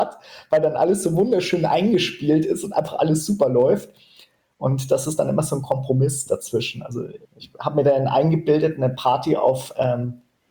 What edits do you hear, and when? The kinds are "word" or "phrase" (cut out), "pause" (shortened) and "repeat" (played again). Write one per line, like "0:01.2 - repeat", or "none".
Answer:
0:07.2 - pause